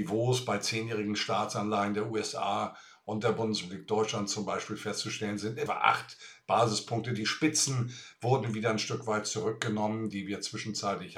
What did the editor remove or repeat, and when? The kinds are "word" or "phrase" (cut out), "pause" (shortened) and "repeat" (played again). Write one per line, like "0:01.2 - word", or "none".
0:05.7 - word